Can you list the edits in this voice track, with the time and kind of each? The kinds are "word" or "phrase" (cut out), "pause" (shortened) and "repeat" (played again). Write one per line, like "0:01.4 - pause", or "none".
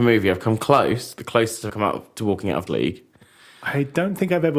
0:01.7 - word
0:02.7 - word

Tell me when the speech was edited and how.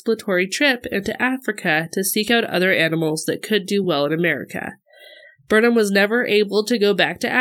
none

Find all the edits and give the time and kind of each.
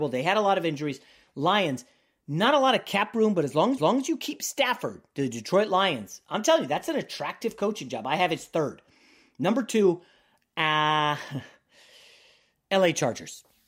0:03.8 - repeat

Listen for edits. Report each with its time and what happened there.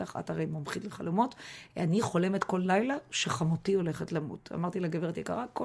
none

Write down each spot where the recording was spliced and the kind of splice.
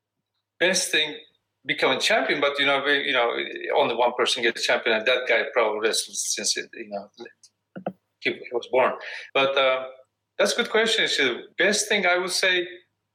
0:09.3 - pause
0:11.5 - pause

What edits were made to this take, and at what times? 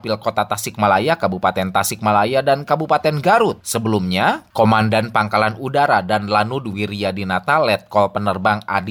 none

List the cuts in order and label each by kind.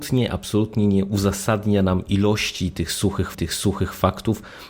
0:03.3 - repeat

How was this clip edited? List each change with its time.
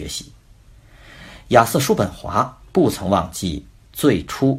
0:02.7 - pause

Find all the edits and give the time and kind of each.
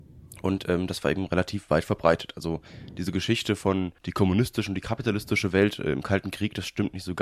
0:04.0 - pause

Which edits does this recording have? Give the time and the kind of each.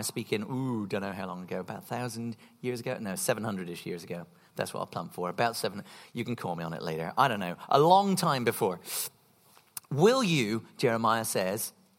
none

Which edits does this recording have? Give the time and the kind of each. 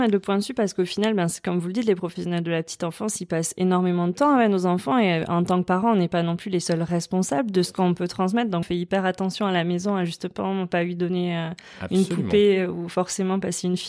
0:08.6 - phrase

